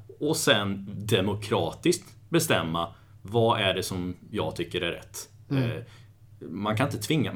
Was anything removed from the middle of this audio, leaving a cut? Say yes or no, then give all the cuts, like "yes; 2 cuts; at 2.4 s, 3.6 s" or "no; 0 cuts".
no; 0 cuts